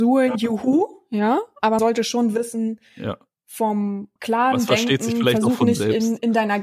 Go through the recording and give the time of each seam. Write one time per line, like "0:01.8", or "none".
0:01.8
0:04.2